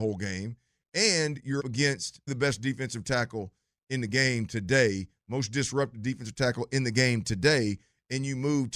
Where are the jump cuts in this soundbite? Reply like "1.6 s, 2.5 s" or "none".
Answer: 1.6 s, 2.3 s

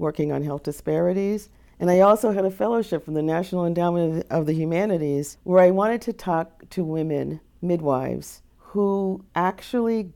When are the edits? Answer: none

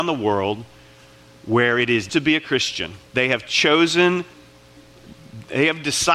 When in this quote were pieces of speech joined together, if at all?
2.1 s, 3.1 s

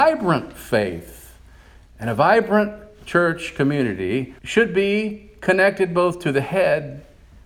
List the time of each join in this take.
4.4 s

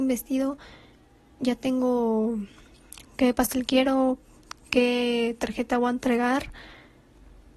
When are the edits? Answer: none

